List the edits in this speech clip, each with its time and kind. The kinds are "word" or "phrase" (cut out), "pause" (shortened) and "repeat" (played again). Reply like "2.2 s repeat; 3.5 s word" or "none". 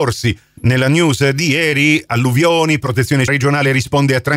3.3 s word